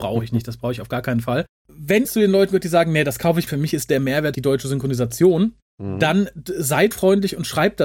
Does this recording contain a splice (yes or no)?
yes